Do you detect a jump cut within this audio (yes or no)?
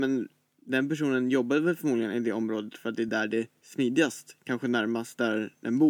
no